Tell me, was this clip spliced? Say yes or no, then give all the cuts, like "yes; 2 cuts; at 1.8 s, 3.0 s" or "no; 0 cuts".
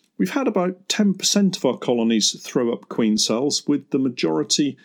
no; 0 cuts